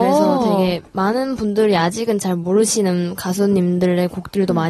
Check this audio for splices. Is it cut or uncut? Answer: uncut